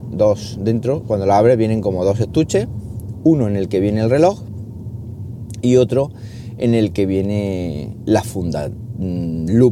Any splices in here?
no; 0 cuts

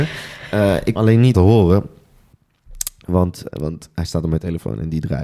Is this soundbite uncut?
no; 3 cuts; at 1.0 s, 1.3 s, 3.5 s

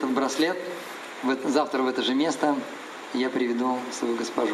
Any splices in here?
no; 0 cuts

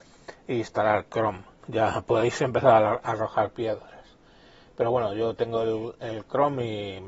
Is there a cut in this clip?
no; 0 cuts

